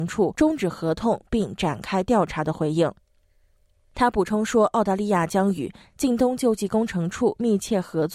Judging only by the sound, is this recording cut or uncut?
uncut